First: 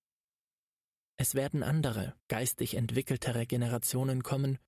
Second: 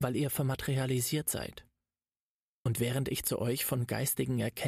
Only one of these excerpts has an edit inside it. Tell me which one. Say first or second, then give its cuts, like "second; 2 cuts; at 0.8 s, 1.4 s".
first; 1 cut; at 2.2 s